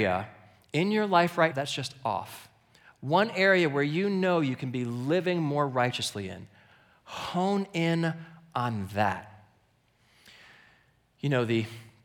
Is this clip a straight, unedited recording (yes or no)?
no